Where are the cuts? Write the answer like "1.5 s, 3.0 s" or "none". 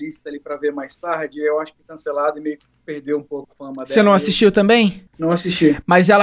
1.8 s, 3.5 s